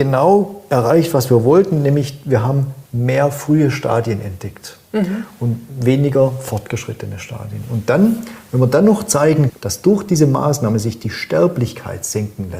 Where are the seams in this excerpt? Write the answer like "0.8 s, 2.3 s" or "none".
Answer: 2.9 s, 9.5 s